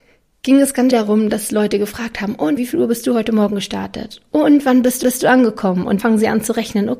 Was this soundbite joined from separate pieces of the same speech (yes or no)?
yes